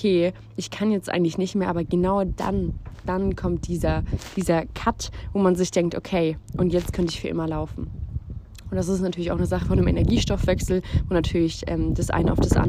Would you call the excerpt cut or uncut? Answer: uncut